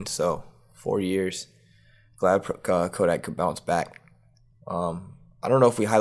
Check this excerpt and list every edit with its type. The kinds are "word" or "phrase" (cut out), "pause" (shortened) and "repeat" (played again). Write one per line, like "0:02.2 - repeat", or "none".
none